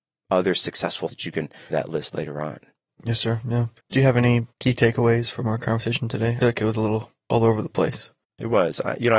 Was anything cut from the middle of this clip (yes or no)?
yes